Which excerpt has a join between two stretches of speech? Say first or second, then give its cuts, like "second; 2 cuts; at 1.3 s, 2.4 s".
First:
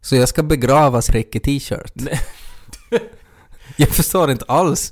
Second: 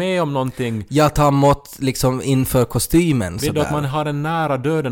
first; 1 cut; at 1.1 s